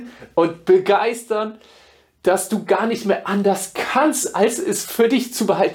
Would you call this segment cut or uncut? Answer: uncut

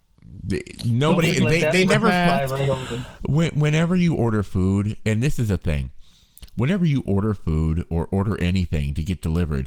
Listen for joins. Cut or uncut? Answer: uncut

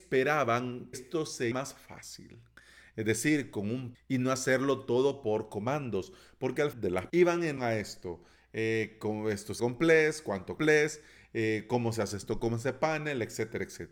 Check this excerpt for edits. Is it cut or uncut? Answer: cut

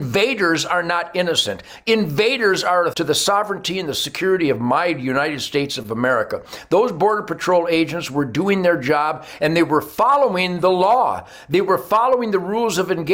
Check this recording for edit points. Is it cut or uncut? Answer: cut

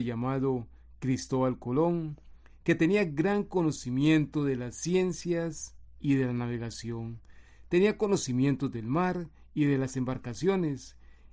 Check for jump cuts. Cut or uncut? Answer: uncut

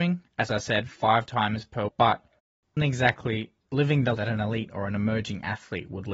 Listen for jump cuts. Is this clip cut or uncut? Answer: cut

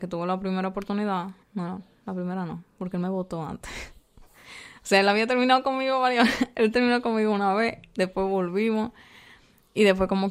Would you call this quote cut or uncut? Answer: cut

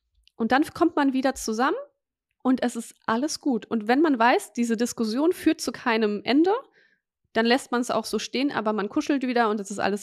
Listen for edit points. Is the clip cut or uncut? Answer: uncut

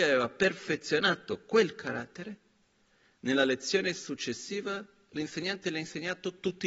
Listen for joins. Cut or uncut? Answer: uncut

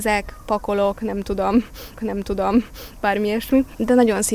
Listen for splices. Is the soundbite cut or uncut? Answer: cut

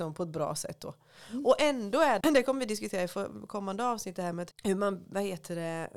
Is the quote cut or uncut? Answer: cut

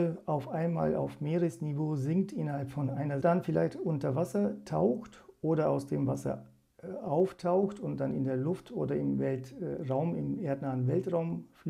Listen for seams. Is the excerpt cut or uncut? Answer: cut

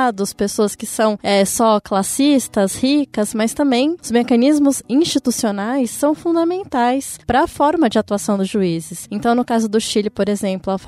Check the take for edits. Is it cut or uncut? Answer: uncut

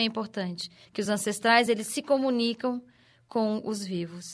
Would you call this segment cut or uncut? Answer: uncut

